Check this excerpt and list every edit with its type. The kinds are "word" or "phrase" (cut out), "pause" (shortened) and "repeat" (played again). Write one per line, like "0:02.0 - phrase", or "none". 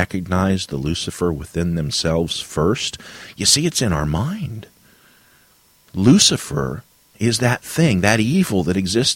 none